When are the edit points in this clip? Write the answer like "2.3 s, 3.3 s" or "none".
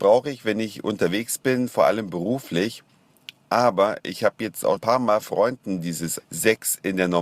4.8 s, 5.2 s, 6.2 s